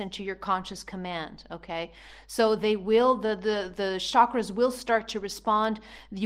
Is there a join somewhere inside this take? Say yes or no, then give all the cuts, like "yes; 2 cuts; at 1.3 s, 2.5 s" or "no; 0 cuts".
no; 0 cuts